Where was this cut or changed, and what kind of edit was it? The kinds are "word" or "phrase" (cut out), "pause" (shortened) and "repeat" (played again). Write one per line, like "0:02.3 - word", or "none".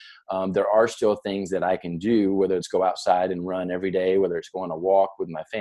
0:02.6 - word